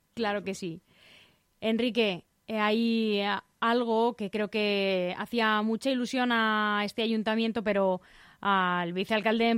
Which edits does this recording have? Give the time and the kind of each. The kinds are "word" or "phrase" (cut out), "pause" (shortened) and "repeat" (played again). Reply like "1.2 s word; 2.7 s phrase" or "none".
2.4 s pause